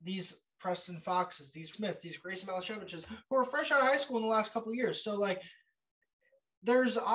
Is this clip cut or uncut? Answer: cut